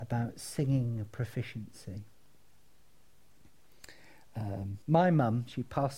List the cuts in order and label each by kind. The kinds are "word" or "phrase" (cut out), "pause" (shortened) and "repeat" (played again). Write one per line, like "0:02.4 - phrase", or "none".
0:04.8 - pause